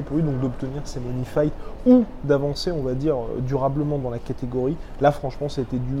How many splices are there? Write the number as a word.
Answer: zero